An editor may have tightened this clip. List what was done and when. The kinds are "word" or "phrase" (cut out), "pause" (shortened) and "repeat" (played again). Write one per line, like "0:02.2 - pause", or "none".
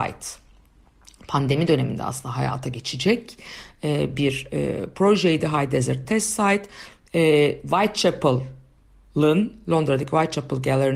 none